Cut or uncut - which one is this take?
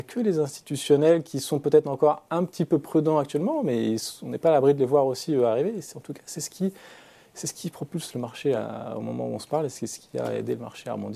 uncut